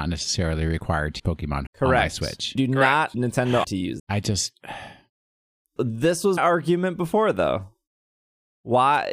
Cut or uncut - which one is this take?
cut